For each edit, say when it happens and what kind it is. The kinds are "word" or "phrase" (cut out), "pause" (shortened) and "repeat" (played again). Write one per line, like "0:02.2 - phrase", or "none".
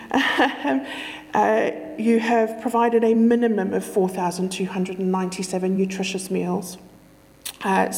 none